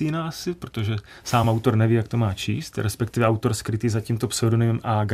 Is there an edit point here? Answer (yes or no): no